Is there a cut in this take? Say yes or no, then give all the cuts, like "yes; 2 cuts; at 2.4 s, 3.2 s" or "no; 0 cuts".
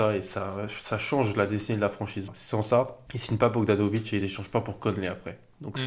no; 0 cuts